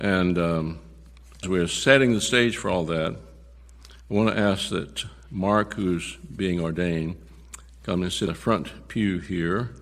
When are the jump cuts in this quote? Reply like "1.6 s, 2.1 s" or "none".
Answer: 1.4 s, 4.0 s, 8.3 s